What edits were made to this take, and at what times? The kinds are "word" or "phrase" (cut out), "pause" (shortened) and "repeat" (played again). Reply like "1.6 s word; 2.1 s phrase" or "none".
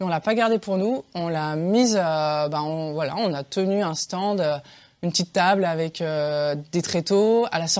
none